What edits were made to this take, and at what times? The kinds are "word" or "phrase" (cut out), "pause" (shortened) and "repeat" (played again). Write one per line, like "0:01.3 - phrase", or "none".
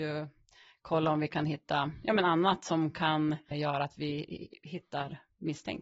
0:03.5 - word

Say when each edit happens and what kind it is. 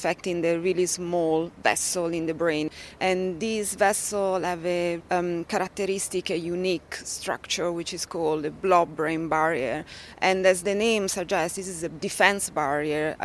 0:05.0 - word

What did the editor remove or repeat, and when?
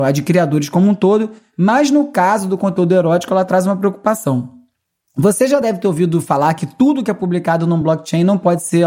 none

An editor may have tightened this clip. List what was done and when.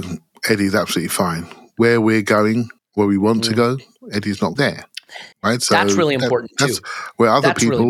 0:02.8 - pause
0:04.6 - word
0:05.3 - pause

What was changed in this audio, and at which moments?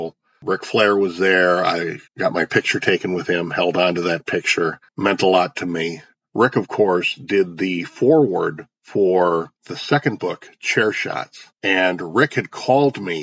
0:02.1 - pause
0:04.9 - pause
0:09.6 - pause
0:11.5 - pause

